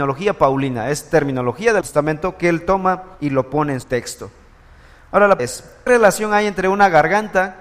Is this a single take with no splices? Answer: no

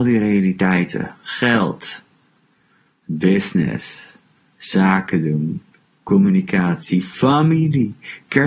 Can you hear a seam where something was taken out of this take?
no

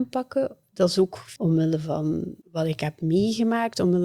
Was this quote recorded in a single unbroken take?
no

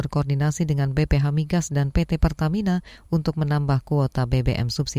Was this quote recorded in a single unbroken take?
yes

